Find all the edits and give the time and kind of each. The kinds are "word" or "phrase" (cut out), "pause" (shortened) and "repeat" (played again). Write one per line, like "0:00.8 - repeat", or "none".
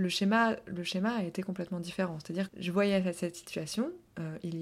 0:02.5 - word